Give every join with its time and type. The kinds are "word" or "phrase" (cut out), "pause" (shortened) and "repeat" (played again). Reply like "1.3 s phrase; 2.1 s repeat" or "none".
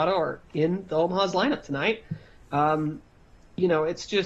none